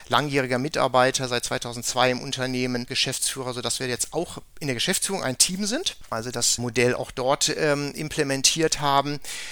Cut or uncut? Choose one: uncut